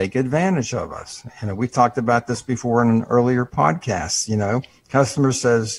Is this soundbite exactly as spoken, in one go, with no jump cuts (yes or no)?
yes